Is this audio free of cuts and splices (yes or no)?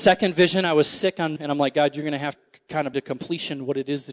no